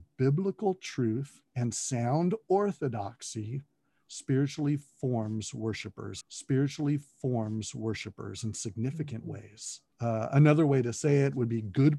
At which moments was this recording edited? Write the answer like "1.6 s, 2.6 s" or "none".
1.5 s, 6.2 s, 9.9 s